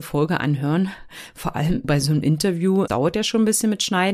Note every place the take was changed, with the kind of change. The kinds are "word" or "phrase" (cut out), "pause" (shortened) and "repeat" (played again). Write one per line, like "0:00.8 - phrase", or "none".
0:01.8 - word
0:02.9 - word